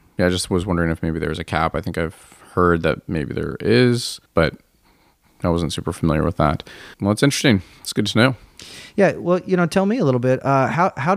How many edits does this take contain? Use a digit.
2